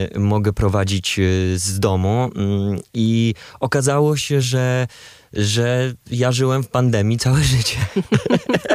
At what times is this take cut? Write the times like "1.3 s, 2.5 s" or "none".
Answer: none